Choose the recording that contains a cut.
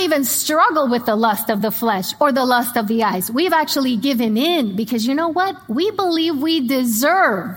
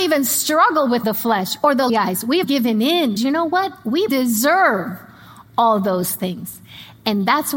second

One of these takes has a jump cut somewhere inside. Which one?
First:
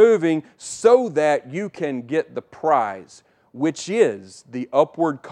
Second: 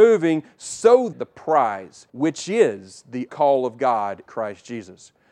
second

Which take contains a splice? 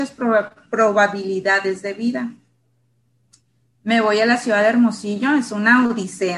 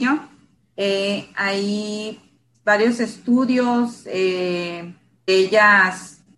second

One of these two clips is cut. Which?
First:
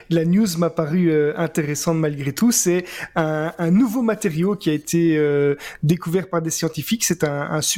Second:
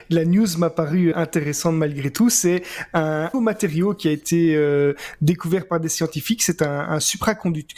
second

